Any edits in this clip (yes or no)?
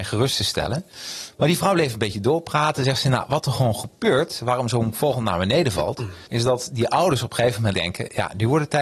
yes